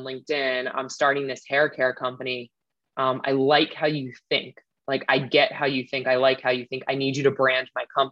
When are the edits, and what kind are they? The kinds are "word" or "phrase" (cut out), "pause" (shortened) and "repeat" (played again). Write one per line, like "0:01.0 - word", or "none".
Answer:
none

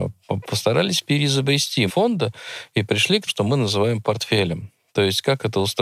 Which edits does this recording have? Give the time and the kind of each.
0:01.9 - word
0:03.3 - word

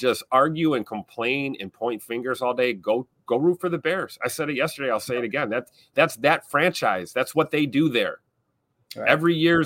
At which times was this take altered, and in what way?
none

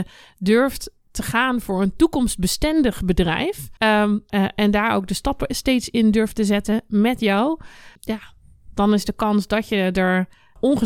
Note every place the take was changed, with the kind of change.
0:03.8 - pause

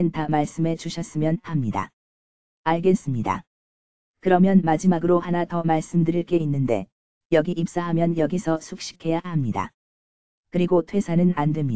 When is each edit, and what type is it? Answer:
none

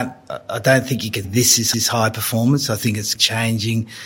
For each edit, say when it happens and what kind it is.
0:01.2 - word
0:01.7 - repeat
0:03.1 - word

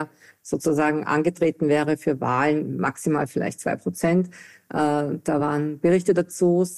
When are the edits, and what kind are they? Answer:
none

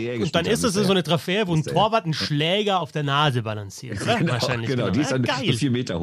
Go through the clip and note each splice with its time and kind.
0:02.8 - phrase

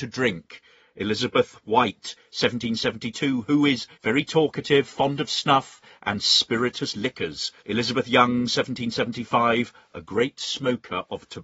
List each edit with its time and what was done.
0:03.9 - pause
0:07.6 - pause

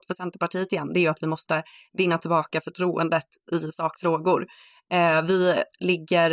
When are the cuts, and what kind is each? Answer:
none

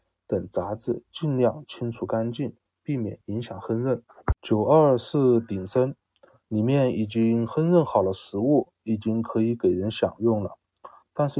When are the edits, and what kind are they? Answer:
0:04.4 - pause

